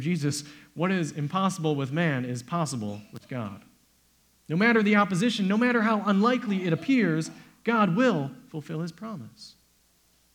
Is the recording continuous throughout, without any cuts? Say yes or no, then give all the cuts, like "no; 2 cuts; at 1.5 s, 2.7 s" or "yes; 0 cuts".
yes; 0 cuts